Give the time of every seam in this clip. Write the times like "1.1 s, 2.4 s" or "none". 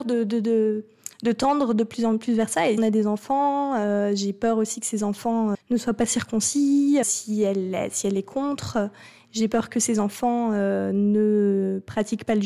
2.8 s, 5.5 s, 7.0 s